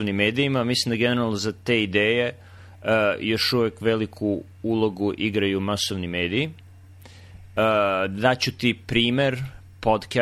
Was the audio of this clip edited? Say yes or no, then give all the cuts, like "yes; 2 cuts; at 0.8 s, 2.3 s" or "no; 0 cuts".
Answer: no; 0 cuts